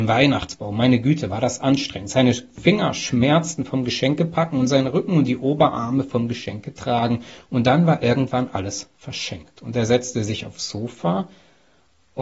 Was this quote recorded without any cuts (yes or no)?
yes